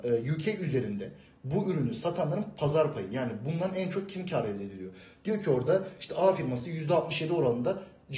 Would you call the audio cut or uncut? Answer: uncut